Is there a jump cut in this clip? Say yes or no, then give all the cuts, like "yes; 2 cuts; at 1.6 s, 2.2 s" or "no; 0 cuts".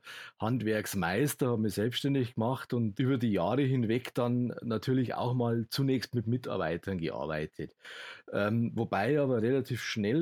yes; 1 cut; at 3.0 s